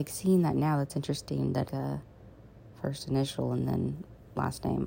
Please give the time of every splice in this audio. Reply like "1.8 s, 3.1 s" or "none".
1.7 s